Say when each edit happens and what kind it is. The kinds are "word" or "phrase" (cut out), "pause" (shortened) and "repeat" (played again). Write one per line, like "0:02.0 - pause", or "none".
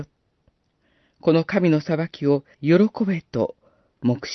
0:02.5 - pause